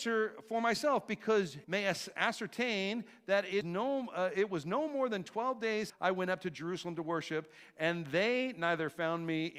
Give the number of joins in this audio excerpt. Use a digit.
3